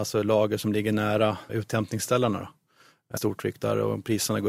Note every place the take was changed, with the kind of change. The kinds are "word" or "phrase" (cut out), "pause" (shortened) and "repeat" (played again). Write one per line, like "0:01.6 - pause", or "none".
0:01.5 - word
0:03.2 - word